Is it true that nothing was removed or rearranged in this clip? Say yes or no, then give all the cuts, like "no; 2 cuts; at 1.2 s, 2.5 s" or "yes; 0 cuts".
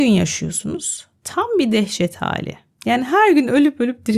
yes; 0 cuts